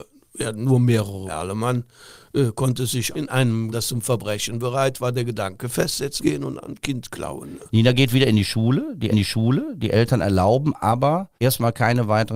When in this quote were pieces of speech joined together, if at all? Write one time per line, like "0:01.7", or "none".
0:01.3
0:03.1
0:03.7
0:06.2
0:09.1
0:11.4